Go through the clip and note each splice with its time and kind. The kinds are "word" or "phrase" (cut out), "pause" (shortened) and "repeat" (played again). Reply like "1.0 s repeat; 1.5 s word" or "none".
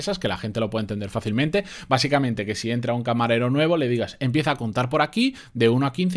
none